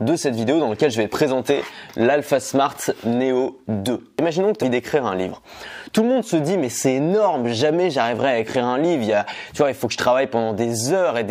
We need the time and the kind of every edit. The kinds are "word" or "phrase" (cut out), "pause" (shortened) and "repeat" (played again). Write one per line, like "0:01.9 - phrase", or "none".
0:04.6 - word